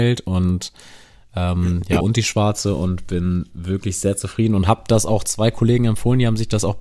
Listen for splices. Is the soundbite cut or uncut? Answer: cut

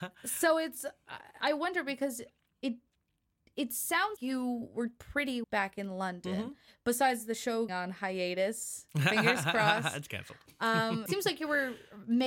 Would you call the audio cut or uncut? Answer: cut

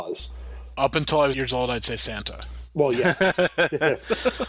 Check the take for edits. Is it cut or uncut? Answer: cut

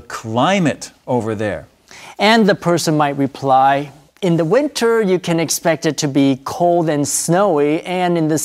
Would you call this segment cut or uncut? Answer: uncut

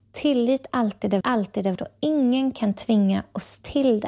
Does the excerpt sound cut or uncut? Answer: cut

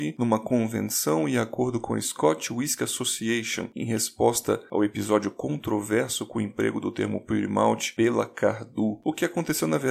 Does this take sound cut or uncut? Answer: uncut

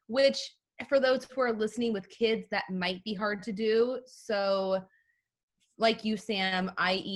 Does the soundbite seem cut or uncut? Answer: uncut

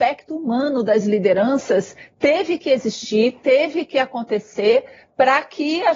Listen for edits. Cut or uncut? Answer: uncut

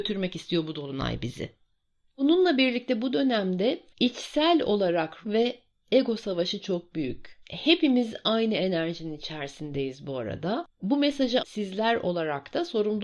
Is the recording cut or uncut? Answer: cut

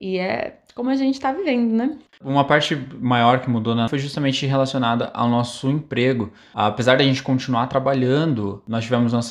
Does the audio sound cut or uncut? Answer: cut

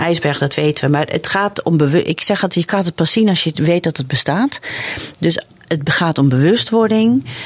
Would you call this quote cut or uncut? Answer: uncut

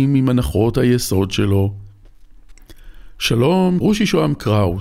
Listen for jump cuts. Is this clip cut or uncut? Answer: cut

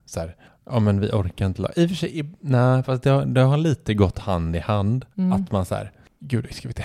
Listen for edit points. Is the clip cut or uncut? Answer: cut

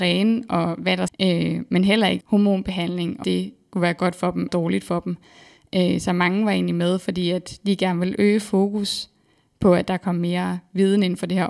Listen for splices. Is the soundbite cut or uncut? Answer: cut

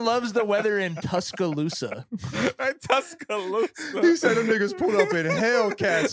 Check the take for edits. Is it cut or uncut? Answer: uncut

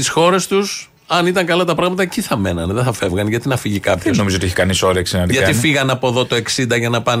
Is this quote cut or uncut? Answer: uncut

